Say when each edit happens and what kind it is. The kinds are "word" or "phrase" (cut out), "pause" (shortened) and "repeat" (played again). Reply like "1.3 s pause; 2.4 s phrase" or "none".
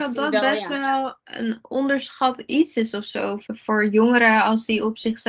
none